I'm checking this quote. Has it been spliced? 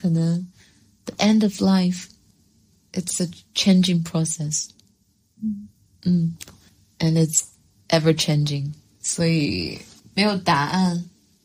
no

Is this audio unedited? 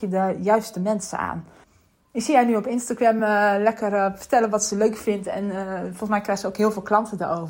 yes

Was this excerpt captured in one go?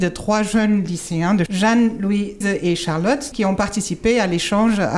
no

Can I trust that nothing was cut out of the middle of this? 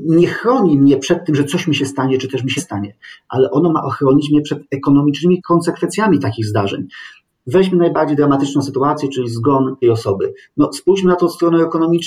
no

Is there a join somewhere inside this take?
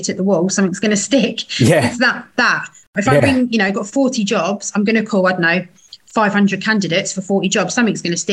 no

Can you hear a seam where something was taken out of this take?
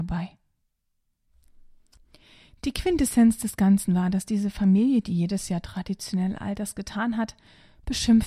no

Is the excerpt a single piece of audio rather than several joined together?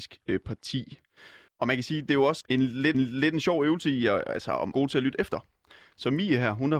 no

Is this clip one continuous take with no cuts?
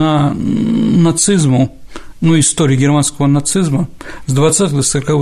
yes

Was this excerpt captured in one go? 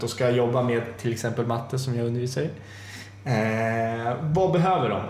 yes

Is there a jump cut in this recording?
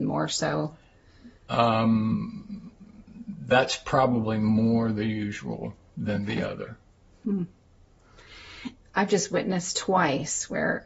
yes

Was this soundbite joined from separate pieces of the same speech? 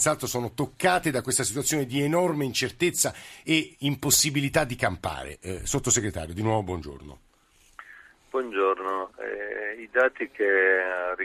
no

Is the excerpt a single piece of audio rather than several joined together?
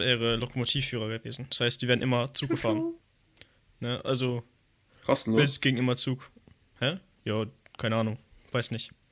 yes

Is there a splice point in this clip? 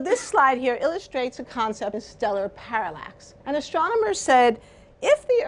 yes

